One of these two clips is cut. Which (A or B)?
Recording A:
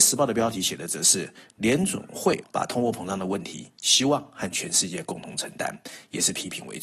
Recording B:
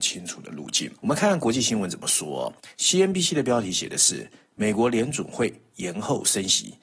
B